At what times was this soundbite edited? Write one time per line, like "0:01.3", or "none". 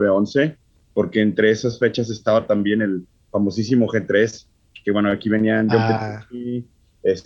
none